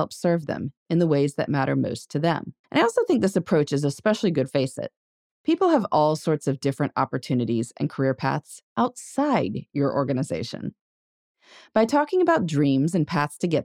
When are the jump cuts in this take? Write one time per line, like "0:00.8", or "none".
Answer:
0:02.6
0:04.5
0:08.7

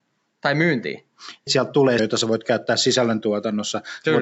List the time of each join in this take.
0:01.5
0:02.0

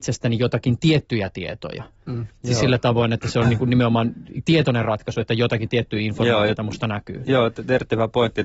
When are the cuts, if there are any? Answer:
none

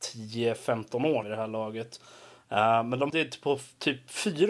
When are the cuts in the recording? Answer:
0:01.2
0:03.1

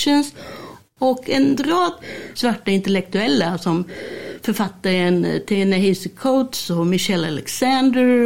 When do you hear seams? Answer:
0:02.3

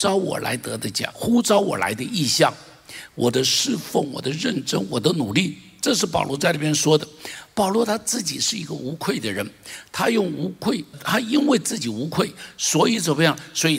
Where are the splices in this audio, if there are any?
0:01.1
0:10.9

